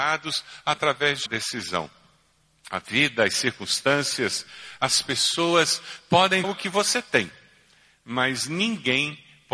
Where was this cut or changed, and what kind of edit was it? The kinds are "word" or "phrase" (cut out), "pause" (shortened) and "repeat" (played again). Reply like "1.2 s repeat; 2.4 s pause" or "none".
1.3 s word; 6.4 s word